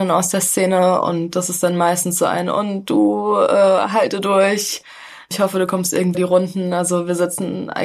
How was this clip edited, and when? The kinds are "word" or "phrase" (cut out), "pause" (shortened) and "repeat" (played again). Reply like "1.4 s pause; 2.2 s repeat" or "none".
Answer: 6.1 s word